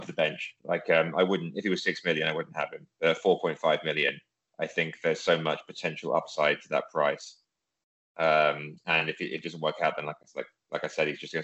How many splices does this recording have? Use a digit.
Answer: 0